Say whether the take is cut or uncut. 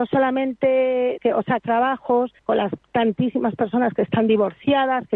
cut